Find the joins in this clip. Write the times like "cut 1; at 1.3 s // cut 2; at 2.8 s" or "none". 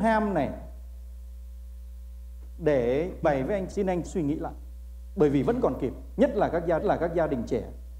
cut 1; at 3.2 s // cut 2; at 3.7 s // cut 3; at 4.1 s // cut 4; at 6.8 s